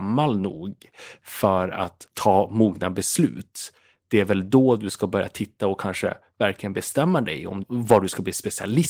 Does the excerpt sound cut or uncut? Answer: uncut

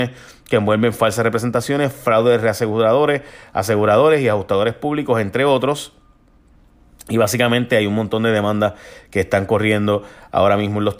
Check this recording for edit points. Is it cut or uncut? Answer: uncut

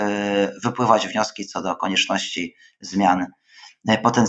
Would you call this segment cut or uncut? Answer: uncut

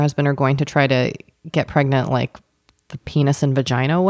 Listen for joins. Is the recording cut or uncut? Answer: uncut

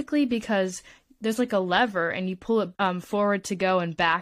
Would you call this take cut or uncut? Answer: cut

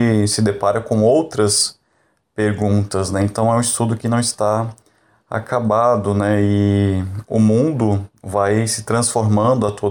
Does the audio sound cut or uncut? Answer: uncut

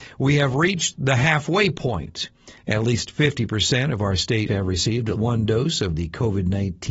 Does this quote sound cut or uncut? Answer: cut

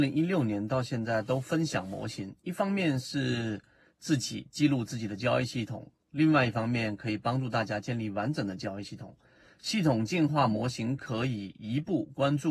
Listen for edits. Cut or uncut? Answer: uncut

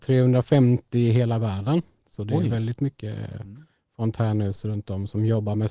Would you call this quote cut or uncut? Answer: uncut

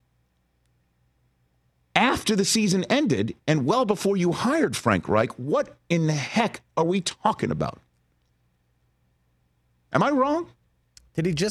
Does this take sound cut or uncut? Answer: uncut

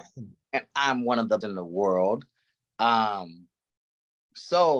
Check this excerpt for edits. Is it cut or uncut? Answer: cut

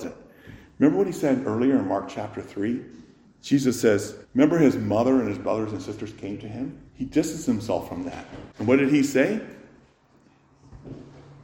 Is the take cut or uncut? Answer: cut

